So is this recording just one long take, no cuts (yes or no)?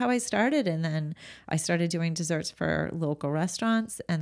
yes